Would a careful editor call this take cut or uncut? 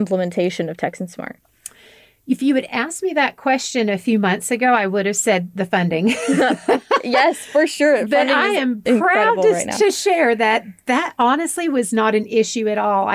uncut